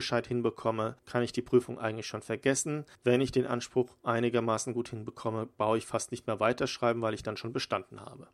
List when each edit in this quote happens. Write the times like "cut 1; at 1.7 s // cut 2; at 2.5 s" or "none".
cut 1; at 1.0 s // cut 2; at 2.9 s